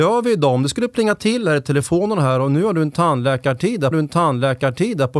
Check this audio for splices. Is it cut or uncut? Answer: cut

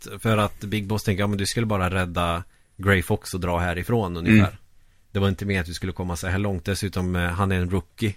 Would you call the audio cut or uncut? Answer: uncut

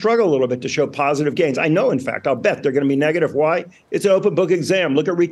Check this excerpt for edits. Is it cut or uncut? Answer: uncut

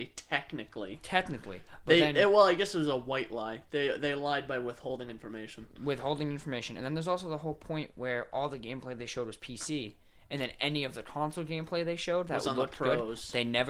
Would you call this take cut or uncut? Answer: uncut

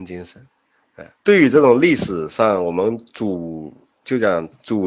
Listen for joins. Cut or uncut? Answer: cut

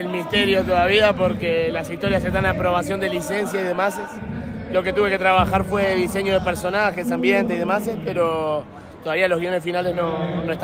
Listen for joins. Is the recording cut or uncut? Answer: uncut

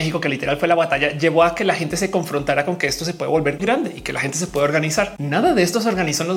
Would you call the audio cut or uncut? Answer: cut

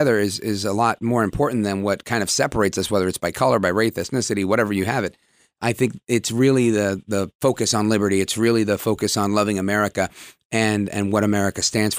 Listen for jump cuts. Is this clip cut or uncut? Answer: uncut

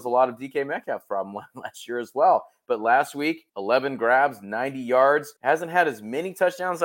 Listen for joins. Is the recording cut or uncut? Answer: cut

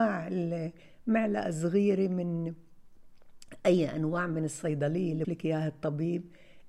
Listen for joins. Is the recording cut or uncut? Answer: cut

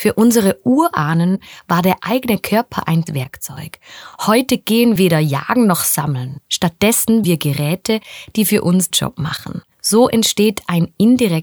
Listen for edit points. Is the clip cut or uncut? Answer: cut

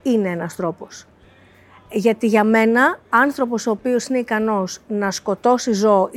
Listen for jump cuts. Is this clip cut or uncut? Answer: uncut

